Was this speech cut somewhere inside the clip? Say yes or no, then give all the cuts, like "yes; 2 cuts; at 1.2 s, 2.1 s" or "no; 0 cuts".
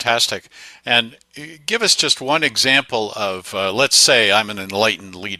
no; 0 cuts